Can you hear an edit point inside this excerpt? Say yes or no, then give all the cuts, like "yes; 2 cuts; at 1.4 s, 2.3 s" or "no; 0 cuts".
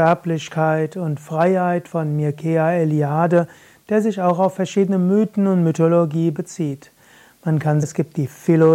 yes; 1 cut; at 7.8 s